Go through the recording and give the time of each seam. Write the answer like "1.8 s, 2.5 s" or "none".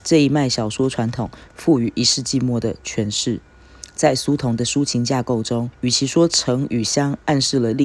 5.7 s

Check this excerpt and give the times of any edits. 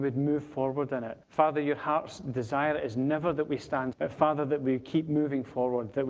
1.2 s, 3.9 s

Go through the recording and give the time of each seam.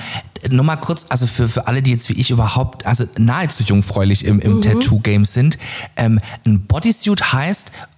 none

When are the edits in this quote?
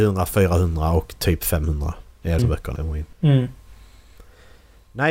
2.4 s, 2.8 s, 3.1 s

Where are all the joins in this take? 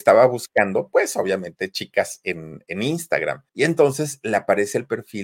3.5 s

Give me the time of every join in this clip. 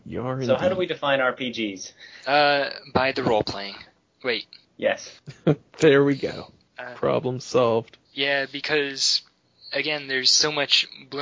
none

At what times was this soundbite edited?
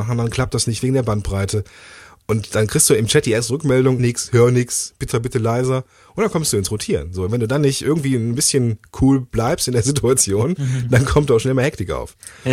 4.0 s, 5.1 s, 7.3 s

